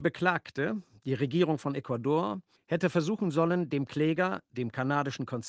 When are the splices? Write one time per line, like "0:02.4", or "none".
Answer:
0:02.6